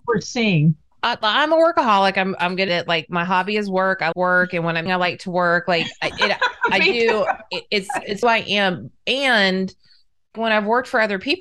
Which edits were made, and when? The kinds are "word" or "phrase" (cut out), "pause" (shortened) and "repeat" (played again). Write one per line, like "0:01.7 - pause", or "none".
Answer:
0:02.7 - word
0:04.1 - word
0:04.9 - word
0:08.2 - word
0:10.3 - word